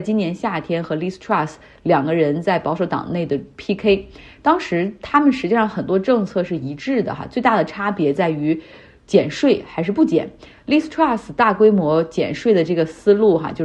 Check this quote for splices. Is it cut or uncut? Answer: uncut